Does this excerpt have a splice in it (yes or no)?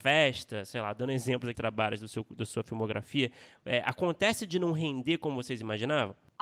yes